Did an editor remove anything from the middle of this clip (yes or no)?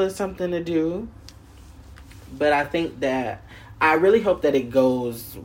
no